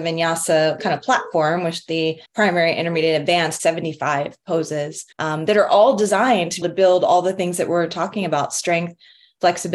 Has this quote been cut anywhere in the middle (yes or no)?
yes